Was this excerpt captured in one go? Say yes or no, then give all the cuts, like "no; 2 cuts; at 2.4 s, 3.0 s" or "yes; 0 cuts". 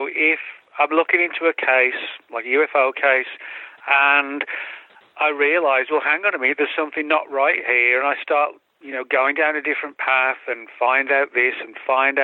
yes; 0 cuts